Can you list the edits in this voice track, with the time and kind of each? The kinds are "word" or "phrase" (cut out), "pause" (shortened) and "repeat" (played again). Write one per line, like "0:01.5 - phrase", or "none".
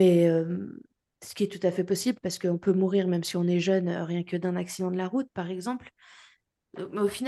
none